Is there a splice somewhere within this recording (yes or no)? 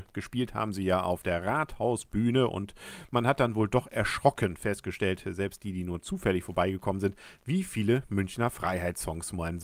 no